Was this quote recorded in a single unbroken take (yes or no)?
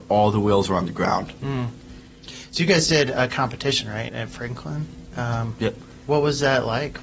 no